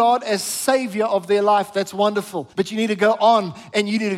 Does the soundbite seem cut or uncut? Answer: cut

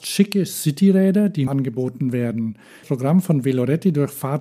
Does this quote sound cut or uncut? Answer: cut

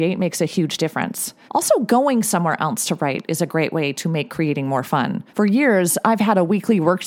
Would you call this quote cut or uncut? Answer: cut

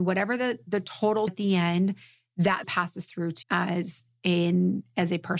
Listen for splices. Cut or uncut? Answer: cut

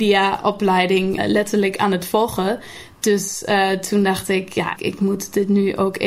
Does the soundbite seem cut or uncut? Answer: cut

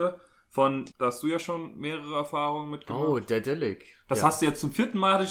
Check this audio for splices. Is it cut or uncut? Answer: cut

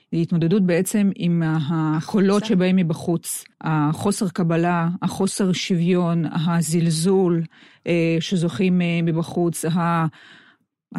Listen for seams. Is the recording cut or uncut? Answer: cut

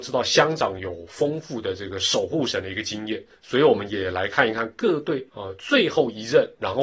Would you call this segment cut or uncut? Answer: cut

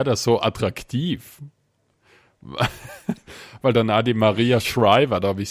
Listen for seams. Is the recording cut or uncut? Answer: uncut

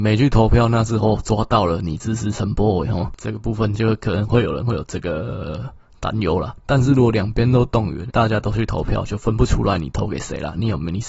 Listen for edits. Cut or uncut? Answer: cut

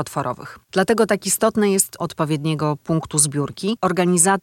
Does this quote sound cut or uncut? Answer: cut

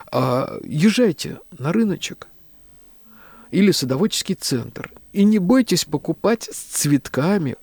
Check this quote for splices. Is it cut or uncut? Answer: uncut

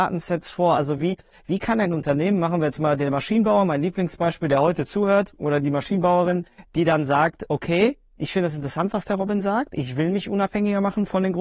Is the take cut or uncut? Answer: uncut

